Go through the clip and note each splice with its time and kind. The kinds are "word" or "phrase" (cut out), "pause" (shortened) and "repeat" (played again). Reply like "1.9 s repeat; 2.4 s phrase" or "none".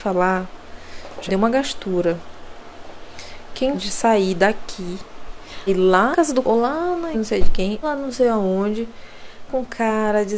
1.3 s word; 3.7 s word; 5.7 s word; 6.1 s word; 6.4 s word; 7.1 s word; 7.8 s word; 9.5 s word

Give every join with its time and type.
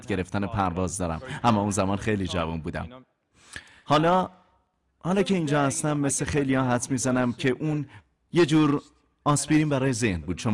none

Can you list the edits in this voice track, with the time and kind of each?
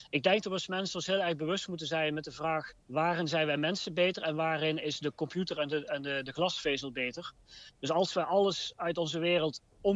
2.8 s pause

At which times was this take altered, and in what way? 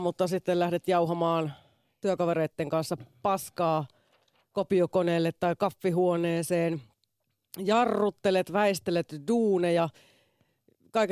none

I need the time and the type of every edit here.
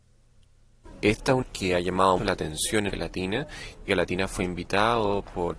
1.4 s word; 2.2 s word; 2.9 s word; 3.9 s word

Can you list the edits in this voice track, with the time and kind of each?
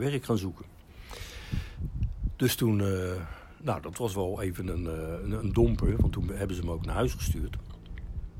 none

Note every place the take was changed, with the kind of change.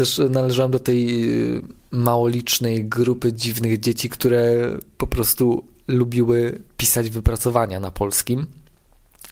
none

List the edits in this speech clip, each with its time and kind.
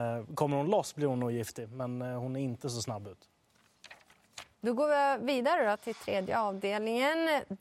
4.5 s pause

